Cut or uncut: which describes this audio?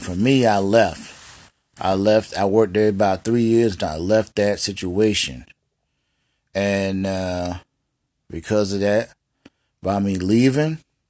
uncut